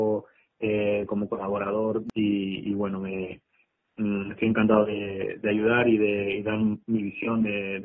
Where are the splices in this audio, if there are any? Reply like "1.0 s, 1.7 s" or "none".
none